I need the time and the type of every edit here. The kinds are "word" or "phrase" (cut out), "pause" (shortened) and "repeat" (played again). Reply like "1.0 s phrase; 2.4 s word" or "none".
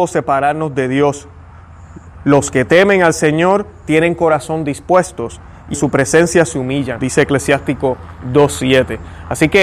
5.7 s word; 7.0 s word